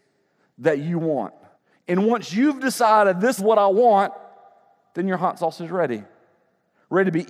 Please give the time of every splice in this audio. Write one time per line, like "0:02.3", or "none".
0:01.5
0:03.4